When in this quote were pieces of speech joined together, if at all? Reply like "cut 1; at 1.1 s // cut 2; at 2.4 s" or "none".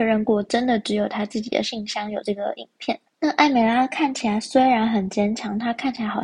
cut 1; at 3.1 s

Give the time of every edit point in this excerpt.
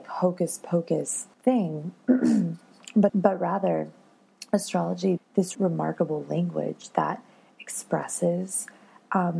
cut 1; at 1.3 s // cut 2; at 3.1 s // cut 3; at 5.2 s // cut 4; at 5.5 s

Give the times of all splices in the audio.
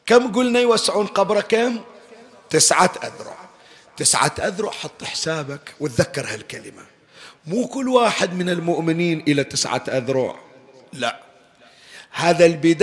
none

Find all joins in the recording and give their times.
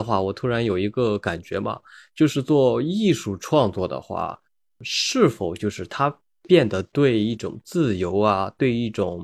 none

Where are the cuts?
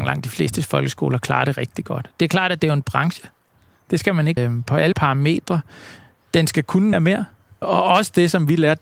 cut 1; at 1.6 s // cut 2; at 2.8 s // cut 3; at 4.4 s // cut 4; at 4.9 s // cut 5; at 6.9 s // cut 6; at 7.6 s

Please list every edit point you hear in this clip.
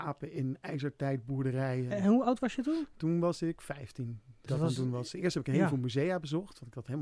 cut 1; at 4.5 s

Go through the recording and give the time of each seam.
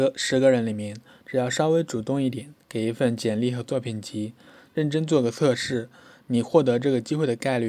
none

